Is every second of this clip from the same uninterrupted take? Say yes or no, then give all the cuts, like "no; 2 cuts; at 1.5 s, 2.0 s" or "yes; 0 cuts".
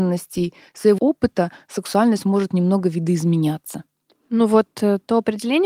no; 1 cut; at 1.0 s